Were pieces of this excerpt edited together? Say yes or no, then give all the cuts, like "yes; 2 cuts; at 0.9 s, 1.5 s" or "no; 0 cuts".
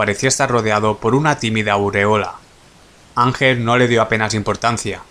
no; 0 cuts